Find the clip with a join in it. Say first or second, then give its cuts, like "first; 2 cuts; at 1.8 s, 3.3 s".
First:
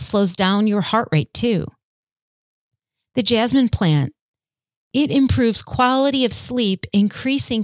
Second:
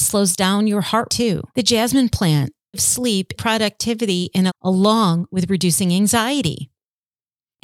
second; 5 cuts; at 1.1 s, 1.5 s, 2.7 s, 3.4 s, 4.5 s